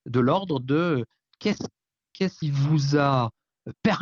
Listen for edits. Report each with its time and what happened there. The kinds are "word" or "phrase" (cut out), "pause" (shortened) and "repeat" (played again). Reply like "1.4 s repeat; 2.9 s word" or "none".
2.4 s word